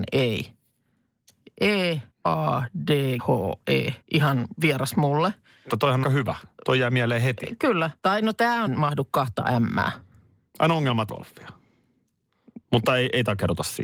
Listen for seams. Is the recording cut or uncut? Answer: cut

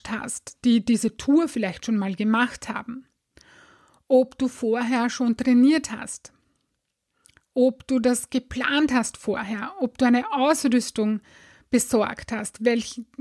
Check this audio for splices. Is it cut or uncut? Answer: uncut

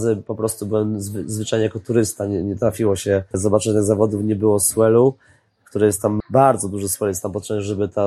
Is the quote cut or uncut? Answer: uncut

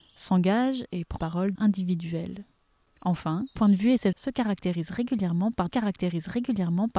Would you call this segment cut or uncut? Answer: cut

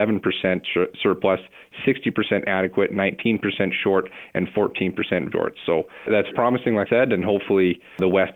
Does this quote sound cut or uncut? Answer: cut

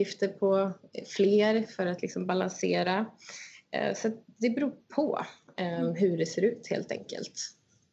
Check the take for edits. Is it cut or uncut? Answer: uncut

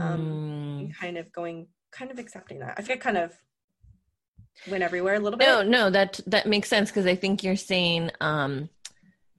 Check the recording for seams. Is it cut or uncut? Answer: cut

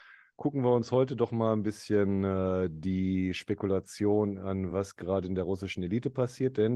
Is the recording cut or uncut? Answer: uncut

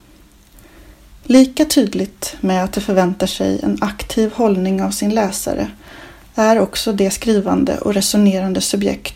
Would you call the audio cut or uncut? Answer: uncut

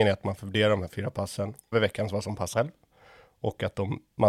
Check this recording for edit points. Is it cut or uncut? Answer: cut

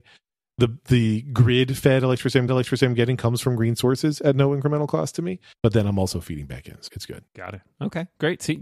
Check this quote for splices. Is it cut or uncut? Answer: cut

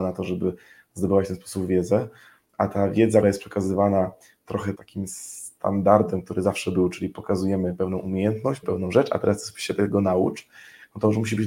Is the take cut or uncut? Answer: cut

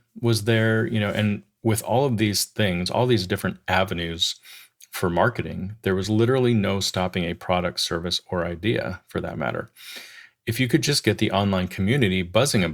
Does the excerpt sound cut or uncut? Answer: uncut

